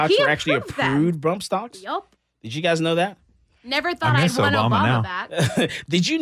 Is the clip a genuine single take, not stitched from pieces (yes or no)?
yes